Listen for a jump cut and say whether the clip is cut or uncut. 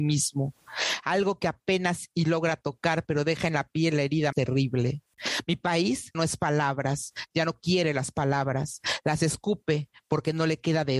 cut